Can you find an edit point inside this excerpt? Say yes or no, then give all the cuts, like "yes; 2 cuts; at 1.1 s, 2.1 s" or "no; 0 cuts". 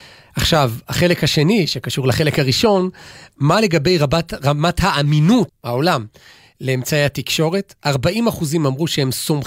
yes; 1 cut; at 5.5 s